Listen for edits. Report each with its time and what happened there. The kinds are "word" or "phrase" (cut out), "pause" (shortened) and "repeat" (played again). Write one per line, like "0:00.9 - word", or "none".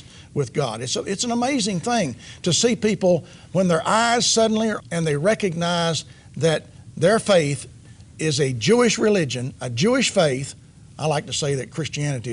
0:04.8 - word